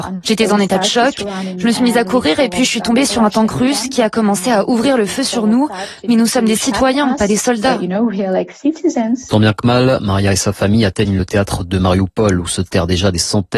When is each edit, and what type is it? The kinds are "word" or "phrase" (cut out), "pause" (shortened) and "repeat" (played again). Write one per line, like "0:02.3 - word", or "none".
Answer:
none